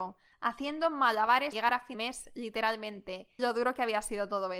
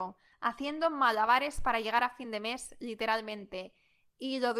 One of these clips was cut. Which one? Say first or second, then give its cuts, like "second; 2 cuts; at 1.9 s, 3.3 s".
first; 3 cuts; at 1.5 s, 1.9 s, 3.4 s